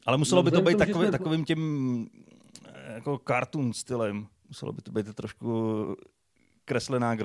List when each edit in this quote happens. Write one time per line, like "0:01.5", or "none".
0:04.4